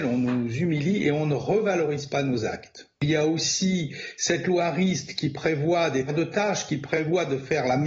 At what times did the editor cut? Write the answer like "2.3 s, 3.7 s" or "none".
6.1 s